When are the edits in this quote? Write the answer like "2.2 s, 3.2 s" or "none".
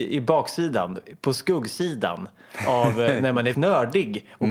3.5 s